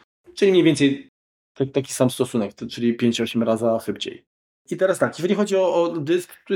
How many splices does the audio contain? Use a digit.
0